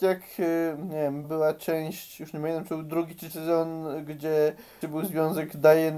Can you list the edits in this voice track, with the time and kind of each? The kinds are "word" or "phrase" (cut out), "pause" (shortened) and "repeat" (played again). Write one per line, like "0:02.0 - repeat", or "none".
0:01.2 - word
0:03.3 - word
0:04.8 - word